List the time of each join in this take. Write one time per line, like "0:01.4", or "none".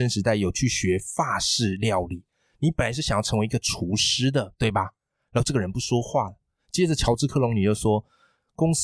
none